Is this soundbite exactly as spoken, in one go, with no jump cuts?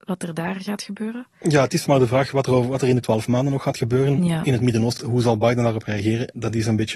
no; 3 cuts; at 1.9 s, 3.0 s, 5.0 s

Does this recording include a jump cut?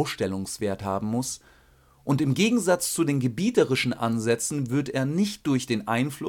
no; 0 cuts

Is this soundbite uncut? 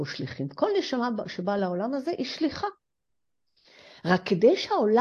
yes; 0 cuts

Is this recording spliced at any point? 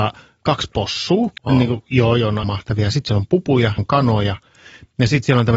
yes; 3 cuts; at 1.4 s, 2.4 s, 3.8 s

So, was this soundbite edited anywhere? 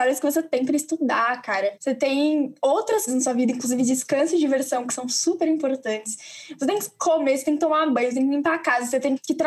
yes; 1 cut; at 3.1 s

